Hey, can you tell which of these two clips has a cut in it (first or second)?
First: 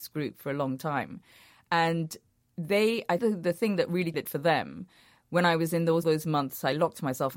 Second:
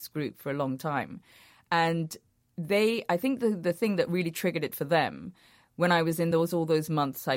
first